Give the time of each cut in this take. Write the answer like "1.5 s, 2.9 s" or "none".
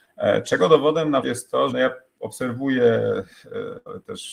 1.2 s, 1.7 s